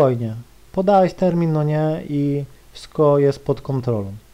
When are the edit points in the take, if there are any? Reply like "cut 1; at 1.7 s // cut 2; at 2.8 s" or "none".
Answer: none